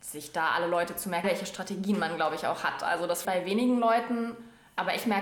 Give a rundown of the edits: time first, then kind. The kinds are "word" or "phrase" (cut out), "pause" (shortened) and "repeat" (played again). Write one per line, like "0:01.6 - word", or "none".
0:01.2 - word
0:03.2 - word